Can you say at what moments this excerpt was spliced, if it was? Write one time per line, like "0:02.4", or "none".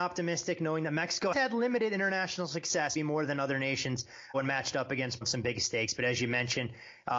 0:01.3
0:03.0
0:04.3
0:05.2